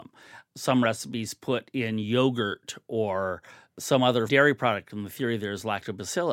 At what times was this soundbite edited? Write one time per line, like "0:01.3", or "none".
0:04.3